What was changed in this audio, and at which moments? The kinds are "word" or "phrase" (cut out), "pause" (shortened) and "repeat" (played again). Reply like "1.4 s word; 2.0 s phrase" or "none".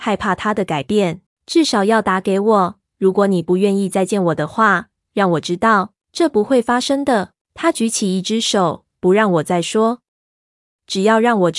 1.3 s pause; 6.0 s pause; 7.4 s pause